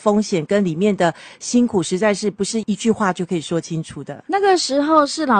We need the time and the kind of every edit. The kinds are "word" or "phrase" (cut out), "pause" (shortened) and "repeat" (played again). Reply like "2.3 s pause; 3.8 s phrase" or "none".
none